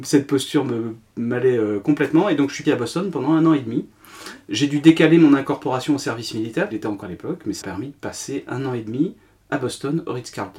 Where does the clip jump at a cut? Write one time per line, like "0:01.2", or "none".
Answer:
0:02.6
0:06.7
0:07.0
0:07.6